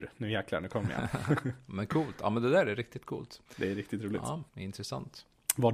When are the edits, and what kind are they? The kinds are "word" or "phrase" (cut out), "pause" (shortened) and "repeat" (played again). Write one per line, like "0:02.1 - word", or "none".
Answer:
0:03.5 - pause
0:04.5 - pause